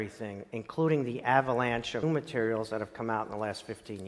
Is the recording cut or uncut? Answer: cut